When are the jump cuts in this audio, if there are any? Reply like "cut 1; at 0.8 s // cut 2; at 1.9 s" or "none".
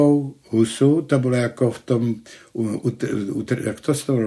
none